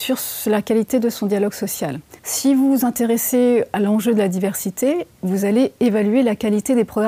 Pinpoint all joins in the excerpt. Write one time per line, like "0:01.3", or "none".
0:02.2